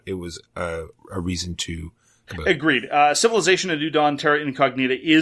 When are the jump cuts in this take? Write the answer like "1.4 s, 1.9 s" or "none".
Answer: 0.9 s, 2.3 s